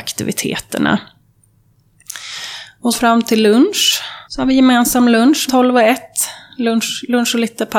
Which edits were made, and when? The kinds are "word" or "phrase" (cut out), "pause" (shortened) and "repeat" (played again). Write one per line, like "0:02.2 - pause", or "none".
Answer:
0:02.9 - phrase
0:04.2 - pause
0:05.5 - word